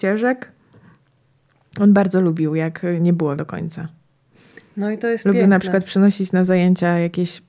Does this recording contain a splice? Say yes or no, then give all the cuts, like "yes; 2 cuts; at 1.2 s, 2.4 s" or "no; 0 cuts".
yes; 1 cut; at 3.4 s